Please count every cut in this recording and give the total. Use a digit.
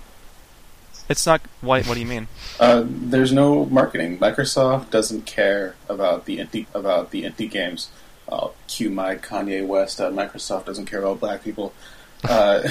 1